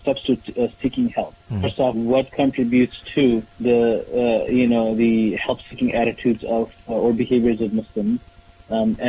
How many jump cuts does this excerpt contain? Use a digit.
3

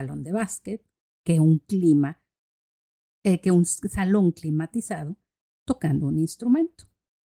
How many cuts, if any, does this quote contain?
0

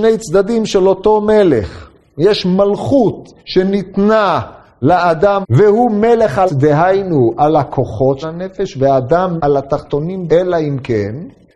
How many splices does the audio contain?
6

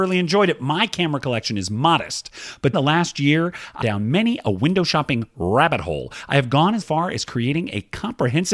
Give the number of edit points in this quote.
3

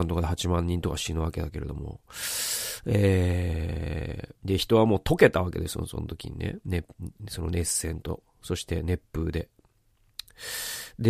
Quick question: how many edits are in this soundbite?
1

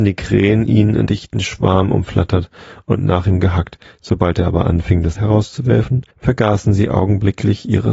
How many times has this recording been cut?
3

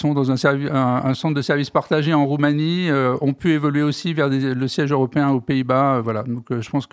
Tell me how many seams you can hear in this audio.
0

